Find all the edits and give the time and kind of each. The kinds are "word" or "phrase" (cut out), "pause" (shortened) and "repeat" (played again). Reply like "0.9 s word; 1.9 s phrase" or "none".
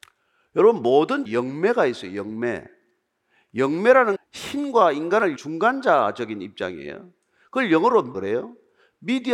1.3 s word; 4.2 s word; 5.4 s word; 8.1 s word